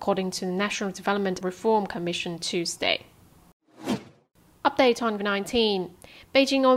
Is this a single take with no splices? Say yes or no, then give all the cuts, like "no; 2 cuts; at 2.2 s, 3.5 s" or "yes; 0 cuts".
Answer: no; 2 cuts; at 1.4 s, 5.2 s